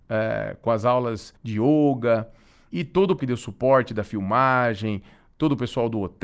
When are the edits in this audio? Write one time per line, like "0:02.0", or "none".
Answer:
0:01.4
0:02.7
0:03.2